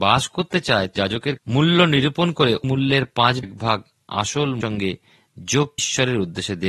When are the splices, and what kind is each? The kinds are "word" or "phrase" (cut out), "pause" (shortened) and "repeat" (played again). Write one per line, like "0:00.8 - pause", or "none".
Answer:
0:01.0 - word
0:01.4 - word
0:02.6 - word
0:03.4 - word
0:04.6 - word
0:05.8 - word